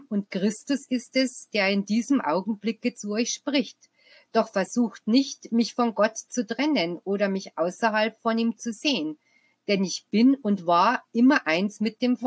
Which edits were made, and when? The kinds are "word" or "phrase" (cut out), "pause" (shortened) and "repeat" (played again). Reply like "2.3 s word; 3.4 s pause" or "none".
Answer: none